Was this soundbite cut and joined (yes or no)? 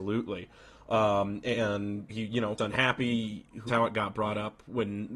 yes